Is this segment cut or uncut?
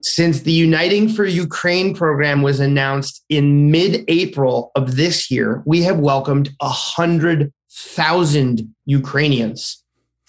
uncut